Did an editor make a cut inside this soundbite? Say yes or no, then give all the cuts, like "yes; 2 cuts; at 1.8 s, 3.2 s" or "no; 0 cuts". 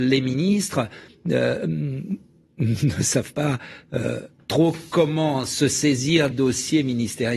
yes; 1 cut; at 6.3 s